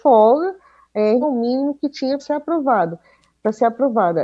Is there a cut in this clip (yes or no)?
yes